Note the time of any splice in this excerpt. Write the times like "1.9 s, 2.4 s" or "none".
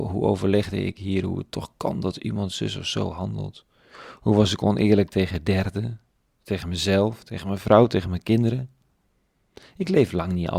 none